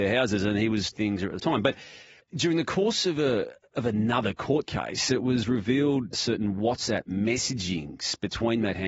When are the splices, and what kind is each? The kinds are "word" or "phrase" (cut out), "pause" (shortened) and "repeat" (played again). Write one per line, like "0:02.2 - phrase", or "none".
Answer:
0:00.9 - phrase
0:01.4 - word
0:02.2 - pause
0:06.1 - word

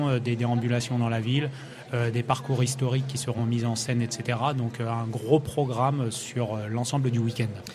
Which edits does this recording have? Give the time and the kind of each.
none

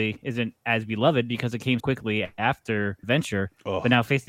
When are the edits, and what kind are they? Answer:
0:01.8 - word
0:03.0 - word

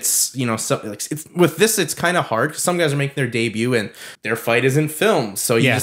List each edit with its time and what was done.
0:04.1 - pause

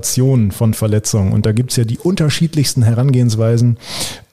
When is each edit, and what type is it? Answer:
none

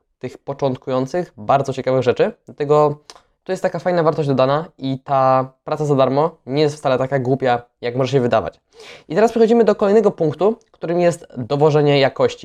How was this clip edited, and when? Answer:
none

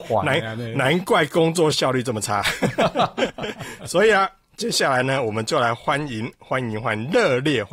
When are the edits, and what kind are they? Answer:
none

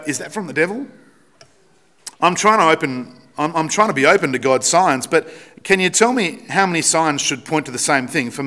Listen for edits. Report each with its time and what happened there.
0:02.1 - pause

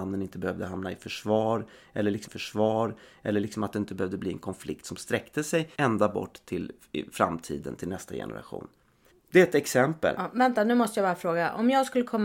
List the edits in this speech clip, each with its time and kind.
0:02.3 - repeat
0:05.7 - pause
0:09.1 - pause

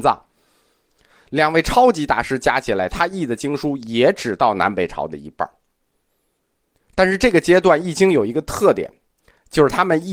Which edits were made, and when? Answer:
none

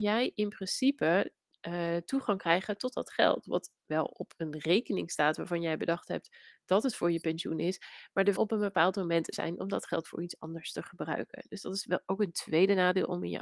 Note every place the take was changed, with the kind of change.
0:08.4 - phrase
0:09.3 - word

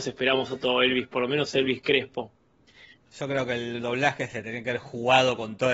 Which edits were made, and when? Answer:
none

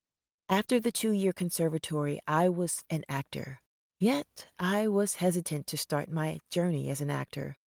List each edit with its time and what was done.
0:02.8 - word

